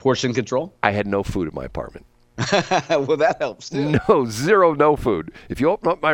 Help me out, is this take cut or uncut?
uncut